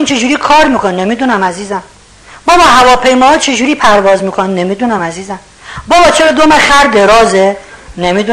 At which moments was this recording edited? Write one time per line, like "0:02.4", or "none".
none

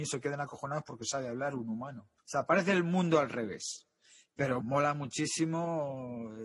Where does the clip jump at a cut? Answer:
0:02.2
0:04.6

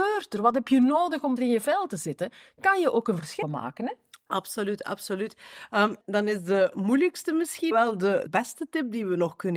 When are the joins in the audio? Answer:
0:01.4
0:03.4
0:06.0
0:07.7
0:08.3

